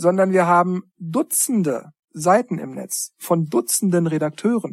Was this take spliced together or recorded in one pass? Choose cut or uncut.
cut